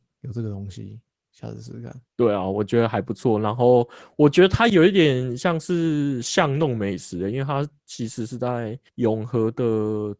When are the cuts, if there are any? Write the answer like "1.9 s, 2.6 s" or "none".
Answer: 1.1 s, 2.1 s, 8.9 s